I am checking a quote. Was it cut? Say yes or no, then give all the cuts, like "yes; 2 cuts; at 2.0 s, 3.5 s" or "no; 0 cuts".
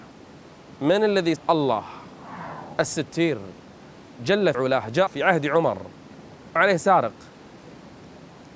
yes; 4 cuts; at 1.4 s, 4.5 s, 5.1 s, 6.6 s